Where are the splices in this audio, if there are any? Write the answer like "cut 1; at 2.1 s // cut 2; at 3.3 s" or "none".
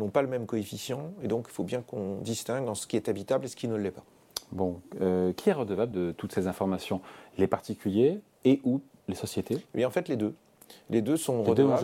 none